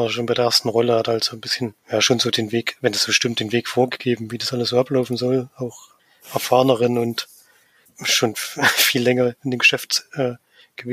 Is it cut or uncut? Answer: cut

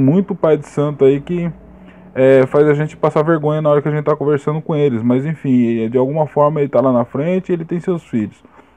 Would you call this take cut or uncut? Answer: uncut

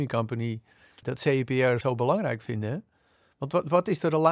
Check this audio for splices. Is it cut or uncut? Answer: cut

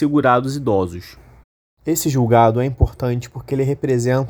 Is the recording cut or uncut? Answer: uncut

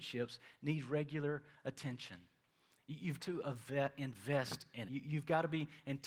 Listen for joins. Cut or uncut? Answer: cut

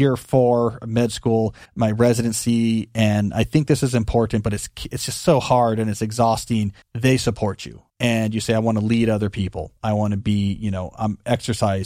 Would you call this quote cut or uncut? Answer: cut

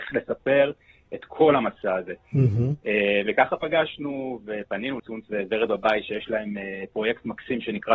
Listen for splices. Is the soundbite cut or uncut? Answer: cut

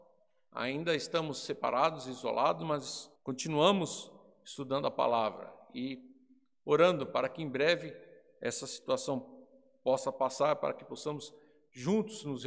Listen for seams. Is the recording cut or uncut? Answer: cut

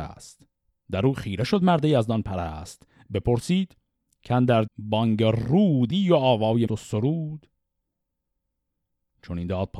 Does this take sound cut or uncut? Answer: cut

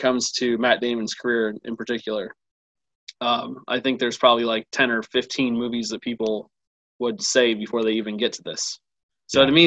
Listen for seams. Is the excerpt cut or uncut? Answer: uncut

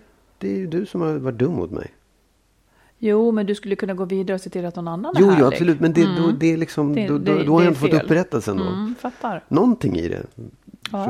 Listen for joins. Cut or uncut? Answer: uncut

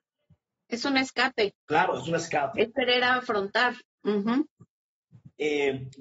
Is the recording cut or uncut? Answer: cut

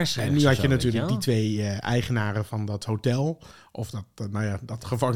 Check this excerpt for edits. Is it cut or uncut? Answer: uncut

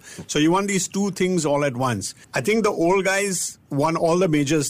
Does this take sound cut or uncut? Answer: cut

